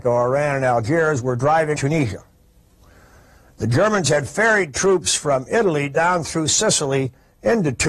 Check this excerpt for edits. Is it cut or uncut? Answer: cut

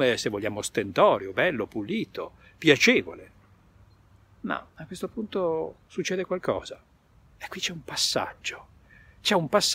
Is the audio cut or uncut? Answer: uncut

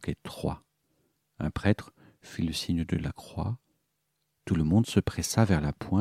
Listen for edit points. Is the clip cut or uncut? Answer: uncut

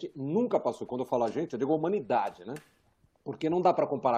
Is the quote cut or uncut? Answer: uncut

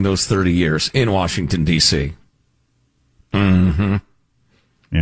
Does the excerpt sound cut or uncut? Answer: uncut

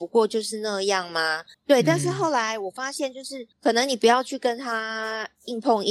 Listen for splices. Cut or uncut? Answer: cut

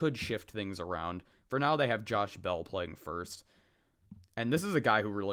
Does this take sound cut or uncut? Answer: uncut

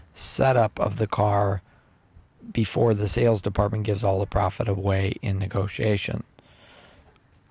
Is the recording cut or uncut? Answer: uncut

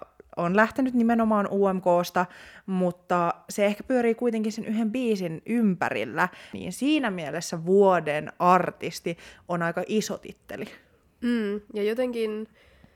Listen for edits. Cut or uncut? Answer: uncut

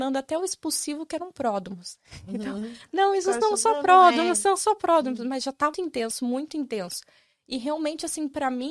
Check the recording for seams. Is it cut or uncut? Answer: cut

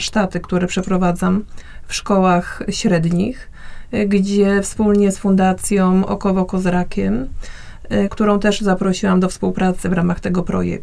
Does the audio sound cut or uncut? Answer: cut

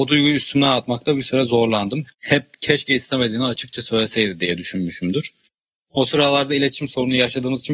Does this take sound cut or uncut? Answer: cut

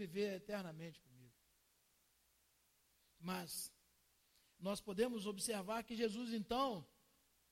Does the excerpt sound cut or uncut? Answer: uncut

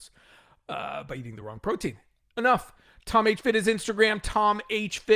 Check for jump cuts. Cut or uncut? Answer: uncut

